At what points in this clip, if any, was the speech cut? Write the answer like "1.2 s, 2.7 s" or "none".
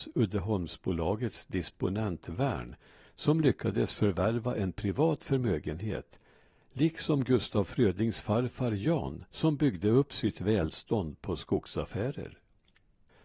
9.3 s